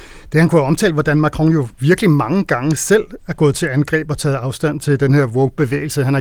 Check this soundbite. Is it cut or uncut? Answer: cut